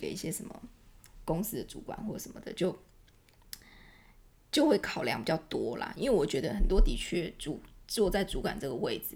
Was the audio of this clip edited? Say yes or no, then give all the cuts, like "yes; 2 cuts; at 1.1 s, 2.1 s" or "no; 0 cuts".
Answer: no; 0 cuts